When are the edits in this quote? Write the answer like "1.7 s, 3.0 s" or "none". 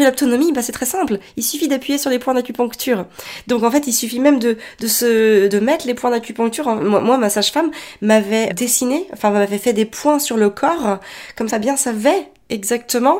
5.5 s, 8.5 s, 11.5 s

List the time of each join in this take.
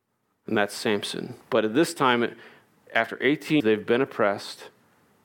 1.4 s, 3.6 s

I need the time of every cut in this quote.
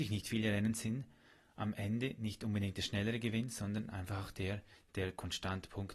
none

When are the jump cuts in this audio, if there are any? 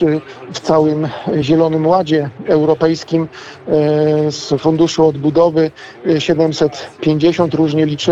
none

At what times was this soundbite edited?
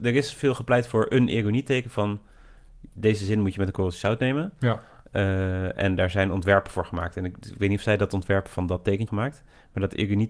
9.1 s

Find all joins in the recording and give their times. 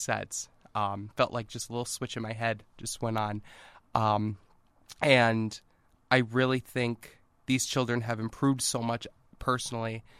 none

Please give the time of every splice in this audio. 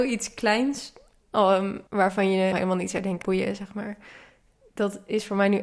1.9 s, 2.5 s, 3.2 s

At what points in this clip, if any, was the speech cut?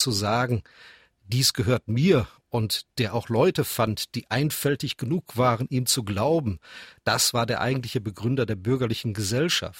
2.4 s

